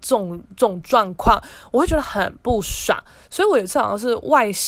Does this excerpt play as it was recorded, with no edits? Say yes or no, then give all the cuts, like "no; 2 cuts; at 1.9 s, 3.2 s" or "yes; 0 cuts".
yes; 0 cuts